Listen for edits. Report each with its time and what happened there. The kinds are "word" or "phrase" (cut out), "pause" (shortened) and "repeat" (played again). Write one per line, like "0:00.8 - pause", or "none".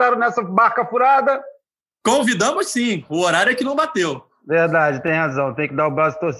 0:01.8 - pause